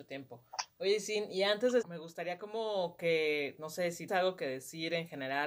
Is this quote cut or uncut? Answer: cut